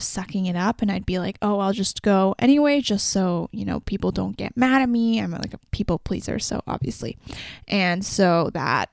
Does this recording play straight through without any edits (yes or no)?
yes